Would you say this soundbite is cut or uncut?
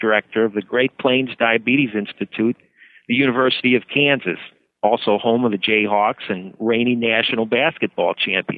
uncut